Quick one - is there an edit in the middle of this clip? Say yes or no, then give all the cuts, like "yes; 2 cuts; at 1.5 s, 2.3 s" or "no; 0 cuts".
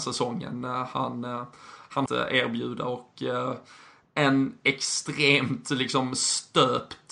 yes; 1 cut; at 2.1 s